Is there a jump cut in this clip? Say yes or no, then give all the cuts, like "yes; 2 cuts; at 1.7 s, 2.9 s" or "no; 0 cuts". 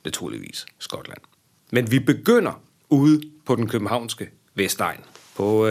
no; 0 cuts